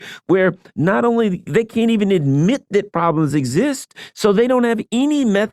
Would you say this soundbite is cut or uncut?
uncut